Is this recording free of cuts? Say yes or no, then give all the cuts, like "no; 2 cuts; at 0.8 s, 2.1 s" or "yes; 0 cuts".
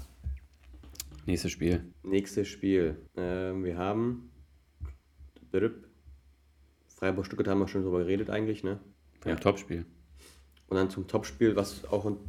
no; 3 cuts; at 1.9 s, 3.1 s, 8.9 s